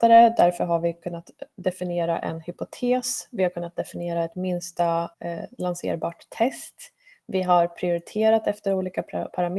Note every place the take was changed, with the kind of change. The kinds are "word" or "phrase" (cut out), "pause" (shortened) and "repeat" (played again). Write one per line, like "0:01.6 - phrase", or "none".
0:05.1 - pause